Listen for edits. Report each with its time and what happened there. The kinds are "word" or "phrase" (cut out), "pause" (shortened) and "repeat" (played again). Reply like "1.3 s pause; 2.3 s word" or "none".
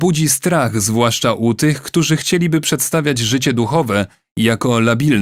none